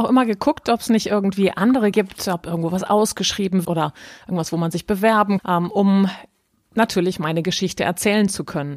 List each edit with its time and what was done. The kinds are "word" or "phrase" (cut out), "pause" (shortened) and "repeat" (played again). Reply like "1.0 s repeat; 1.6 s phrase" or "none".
1.9 s word; 3.6 s word; 5.4 s word